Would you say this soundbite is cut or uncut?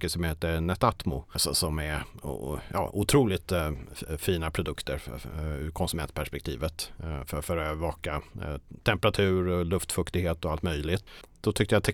uncut